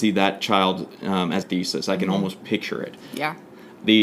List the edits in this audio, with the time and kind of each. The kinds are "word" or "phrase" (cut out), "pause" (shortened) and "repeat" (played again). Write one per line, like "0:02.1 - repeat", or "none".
0:01.4 - phrase